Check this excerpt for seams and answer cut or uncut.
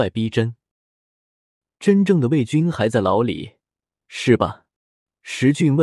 uncut